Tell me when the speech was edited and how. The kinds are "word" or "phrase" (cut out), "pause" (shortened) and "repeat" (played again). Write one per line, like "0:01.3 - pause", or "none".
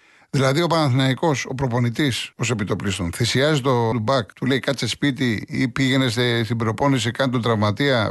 0:02.3 - pause
0:03.9 - word
0:04.3 - pause